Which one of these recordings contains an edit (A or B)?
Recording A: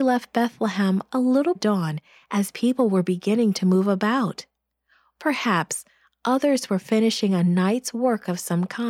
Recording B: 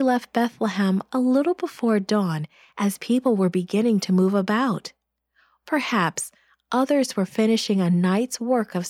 A